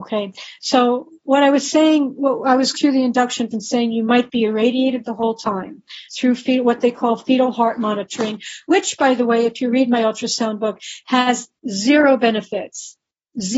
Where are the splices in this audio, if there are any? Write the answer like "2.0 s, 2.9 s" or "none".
2.7 s, 3.5 s, 6.1 s